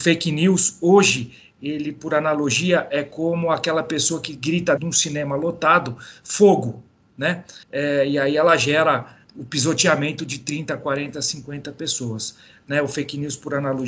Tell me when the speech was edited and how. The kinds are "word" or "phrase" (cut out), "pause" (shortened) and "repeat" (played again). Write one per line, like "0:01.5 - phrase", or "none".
0:04.8 - word
0:07.6 - pause